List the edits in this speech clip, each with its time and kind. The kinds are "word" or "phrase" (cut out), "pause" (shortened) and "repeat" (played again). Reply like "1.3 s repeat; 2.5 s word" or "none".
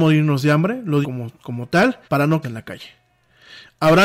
1.0 s word; 2.0 s pause; 2.4 s word